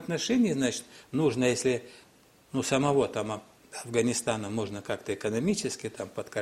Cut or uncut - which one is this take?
uncut